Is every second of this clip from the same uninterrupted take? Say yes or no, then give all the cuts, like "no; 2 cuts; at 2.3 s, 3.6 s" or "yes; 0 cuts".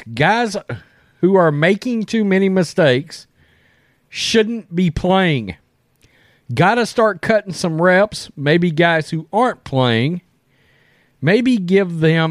yes; 0 cuts